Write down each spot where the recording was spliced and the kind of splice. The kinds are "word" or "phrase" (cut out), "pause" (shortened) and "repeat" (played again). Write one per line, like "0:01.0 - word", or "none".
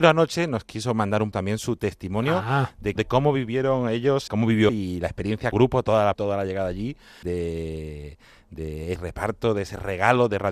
0:01.3 - word
0:03.0 - word
0:04.3 - word
0:04.7 - word
0:05.5 - word
0:06.1 - word
0:07.2 - word
0:09.0 - word